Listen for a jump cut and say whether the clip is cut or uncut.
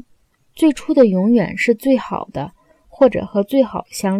uncut